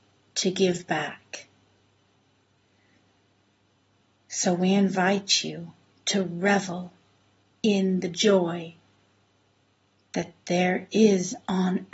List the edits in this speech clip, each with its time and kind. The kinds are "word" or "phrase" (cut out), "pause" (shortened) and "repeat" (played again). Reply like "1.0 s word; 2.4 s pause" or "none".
none